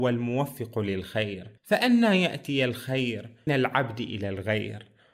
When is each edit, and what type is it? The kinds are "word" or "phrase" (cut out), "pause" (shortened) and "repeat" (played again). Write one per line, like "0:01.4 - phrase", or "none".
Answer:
0:01.6 - pause
0:03.5 - word